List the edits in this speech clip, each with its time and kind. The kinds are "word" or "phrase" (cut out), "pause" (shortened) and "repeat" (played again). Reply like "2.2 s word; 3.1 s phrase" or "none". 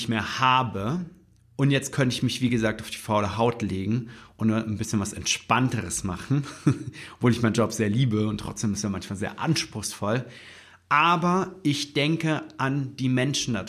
none